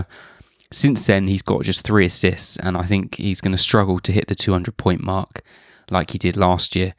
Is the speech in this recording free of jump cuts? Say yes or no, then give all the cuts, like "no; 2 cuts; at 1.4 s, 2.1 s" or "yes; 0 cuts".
yes; 0 cuts